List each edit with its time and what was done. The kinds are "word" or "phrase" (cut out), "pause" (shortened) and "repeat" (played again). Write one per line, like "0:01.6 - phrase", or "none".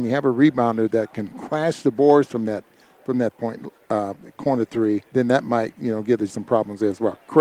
0:03.3 - word
0:05.0 - pause
0:06.3 - word